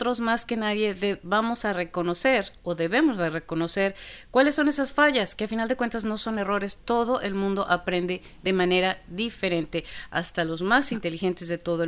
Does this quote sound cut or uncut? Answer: uncut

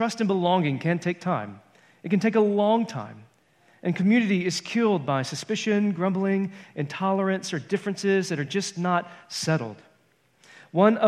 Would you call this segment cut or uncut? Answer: uncut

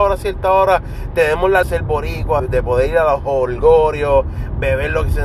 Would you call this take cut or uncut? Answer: cut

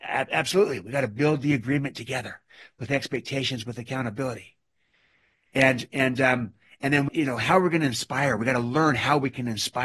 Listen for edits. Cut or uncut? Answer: cut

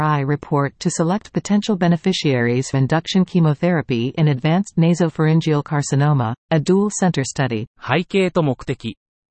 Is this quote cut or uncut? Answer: cut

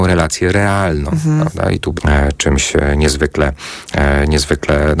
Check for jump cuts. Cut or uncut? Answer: cut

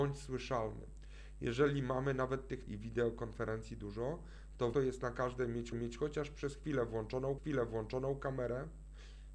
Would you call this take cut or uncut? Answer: cut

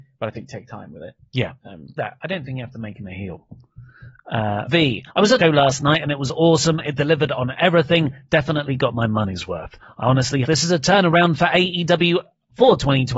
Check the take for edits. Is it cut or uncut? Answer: cut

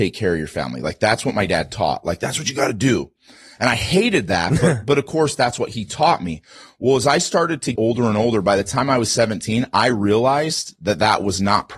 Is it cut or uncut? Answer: cut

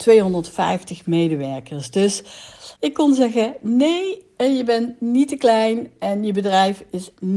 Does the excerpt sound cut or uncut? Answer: cut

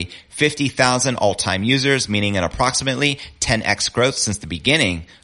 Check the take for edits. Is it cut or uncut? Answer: uncut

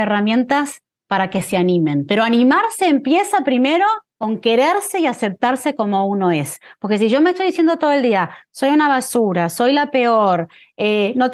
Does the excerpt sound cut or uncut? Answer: cut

